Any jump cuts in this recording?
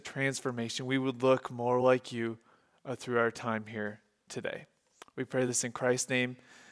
no; 0 cuts

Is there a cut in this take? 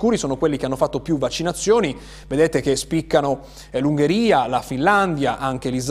no; 0 cuts

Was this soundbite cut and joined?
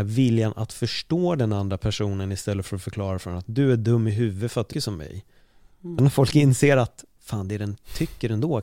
yes; 2 cuts; at 4.7 s, 6.0 s

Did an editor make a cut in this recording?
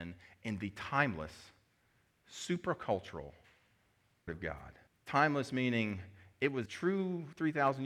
yes; 3 cuts; at 4.3 s, 4.9 s, 6.7 s

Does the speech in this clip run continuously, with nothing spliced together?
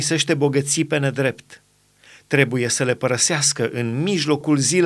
yes; 0 cuts

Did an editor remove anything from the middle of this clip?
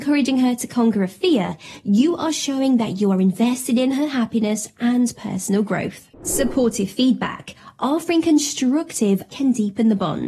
yes; 2 cuts; at 6.1 s, 9.3 s

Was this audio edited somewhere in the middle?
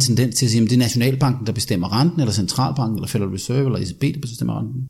no; 0 cuts

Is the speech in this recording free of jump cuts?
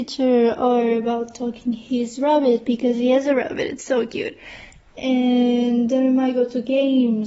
yes; 0 cuts

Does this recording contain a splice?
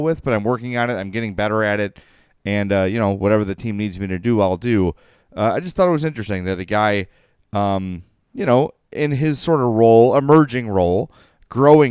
no; 0 cuts

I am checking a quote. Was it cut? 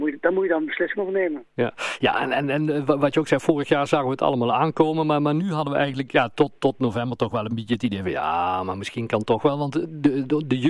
no; 0 cuts

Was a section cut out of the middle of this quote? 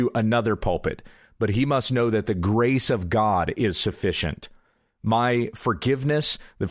no; 0 cuts

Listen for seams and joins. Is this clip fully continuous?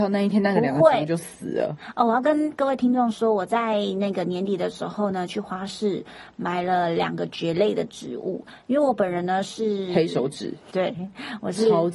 no; 1 cut; at 10.7 s

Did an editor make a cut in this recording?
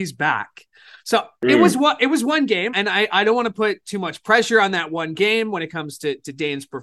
yes; 1 cut; at 2.7 s

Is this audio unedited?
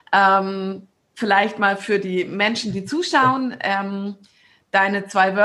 yes; 0 cuts

